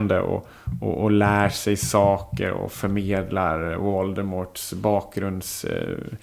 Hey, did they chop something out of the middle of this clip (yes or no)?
no